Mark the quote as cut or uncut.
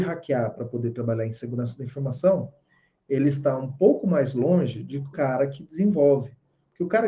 cut